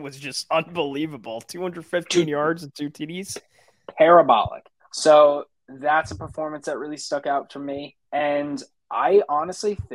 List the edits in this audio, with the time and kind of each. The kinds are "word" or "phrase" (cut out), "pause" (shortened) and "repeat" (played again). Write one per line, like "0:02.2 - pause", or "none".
0:04.8 - pause
0:08.1 - pause